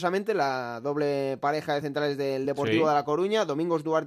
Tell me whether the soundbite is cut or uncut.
uncut